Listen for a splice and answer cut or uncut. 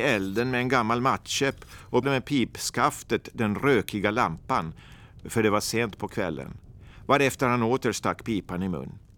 cut